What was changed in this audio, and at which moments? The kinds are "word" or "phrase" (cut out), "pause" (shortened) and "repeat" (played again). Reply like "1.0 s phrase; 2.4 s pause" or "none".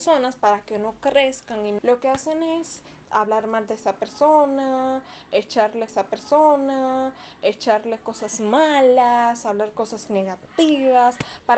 1.8 s word; 3.1 s word; 5.9 s repeat

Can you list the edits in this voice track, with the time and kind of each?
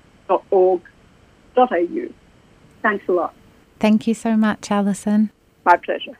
none

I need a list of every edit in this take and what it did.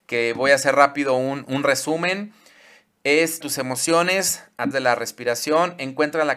1.5 s word; 3.4 s word; 4.7 s word

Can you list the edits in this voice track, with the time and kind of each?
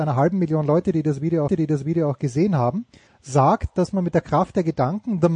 1.5 s repeat; 3.1 s pause

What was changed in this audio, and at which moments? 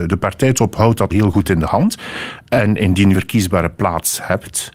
1.1 s word; 3.1 s phrase

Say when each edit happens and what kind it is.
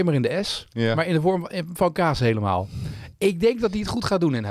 none

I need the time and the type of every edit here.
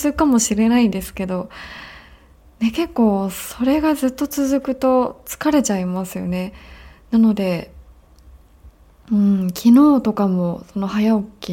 none

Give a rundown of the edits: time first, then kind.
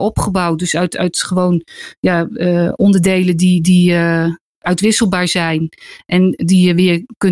none

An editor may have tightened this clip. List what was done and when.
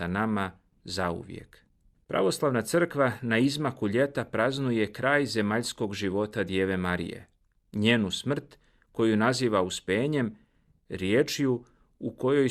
none

